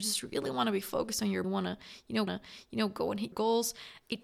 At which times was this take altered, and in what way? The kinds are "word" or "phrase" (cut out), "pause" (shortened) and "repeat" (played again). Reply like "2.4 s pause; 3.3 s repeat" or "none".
1.4 s phrase; 2.3 s repeat; 3.3 s word